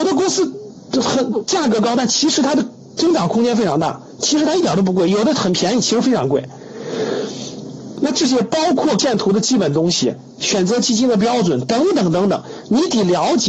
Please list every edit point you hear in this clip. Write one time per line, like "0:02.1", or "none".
0:09.0